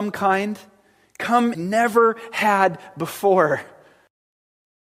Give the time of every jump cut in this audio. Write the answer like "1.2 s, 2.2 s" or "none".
1.5 s